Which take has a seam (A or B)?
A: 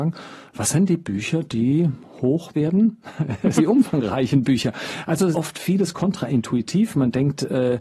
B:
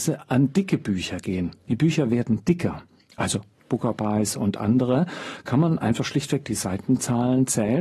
A